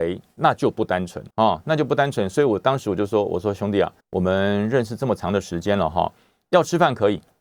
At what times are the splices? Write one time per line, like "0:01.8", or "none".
0:01.3
0:04.0